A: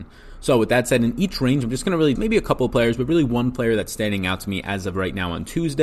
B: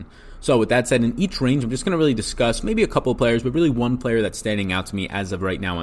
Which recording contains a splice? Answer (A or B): A